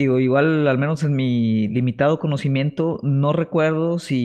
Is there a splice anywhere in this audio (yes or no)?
no